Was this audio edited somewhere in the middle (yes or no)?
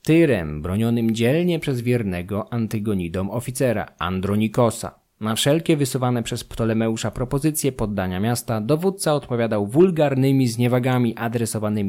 no